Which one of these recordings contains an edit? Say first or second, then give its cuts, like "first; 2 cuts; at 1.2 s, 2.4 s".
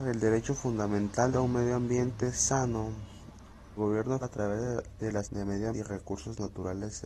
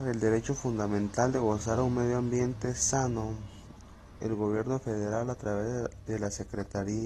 first; 5 cuts; at 1.3 s, 3.8 s, 4.2 s, 5.2 s, 5.7 s